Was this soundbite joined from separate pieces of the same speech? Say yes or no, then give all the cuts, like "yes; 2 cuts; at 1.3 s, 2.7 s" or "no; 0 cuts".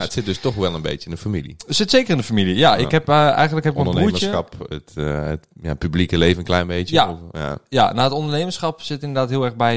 no; 0 cuts